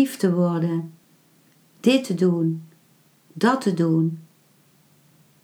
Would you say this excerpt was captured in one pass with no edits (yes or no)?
yes